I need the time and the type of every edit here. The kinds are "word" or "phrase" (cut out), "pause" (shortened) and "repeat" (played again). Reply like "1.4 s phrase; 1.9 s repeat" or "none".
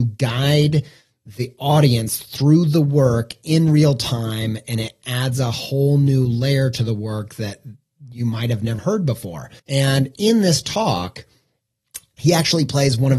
8.8 s word; 9.6 s pause